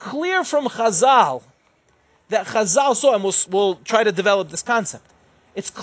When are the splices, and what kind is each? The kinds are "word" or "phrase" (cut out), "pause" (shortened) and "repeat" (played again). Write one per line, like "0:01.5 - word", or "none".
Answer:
0:03.5 - word